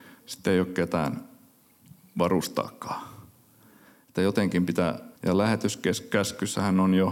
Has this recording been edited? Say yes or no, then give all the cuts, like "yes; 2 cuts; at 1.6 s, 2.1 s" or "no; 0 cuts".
yes; 1 cut; at 5.2 s